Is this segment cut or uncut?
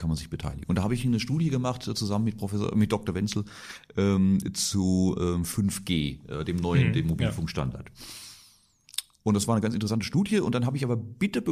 uncut